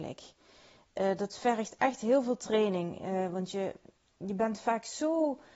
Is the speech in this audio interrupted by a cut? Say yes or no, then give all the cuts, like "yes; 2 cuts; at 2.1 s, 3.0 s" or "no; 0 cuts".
no; 0 cuts